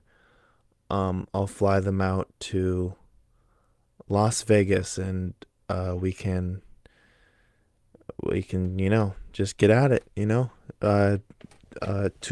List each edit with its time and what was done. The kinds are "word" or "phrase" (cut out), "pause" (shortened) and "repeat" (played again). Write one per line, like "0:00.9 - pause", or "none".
none